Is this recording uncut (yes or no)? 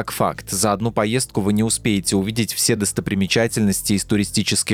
yes